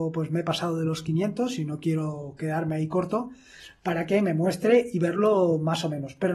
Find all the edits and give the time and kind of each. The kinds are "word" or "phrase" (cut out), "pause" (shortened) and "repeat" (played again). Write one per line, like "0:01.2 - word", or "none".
none